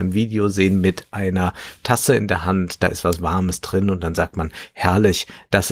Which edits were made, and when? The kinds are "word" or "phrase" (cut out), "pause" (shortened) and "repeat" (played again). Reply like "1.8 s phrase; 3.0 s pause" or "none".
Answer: none